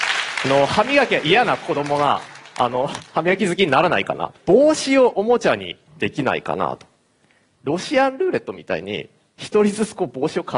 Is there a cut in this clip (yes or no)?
yes